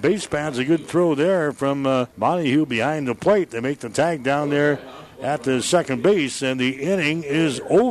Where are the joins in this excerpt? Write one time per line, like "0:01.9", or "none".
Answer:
0:02.1